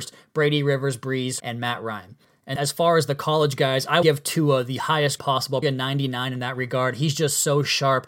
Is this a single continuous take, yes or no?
no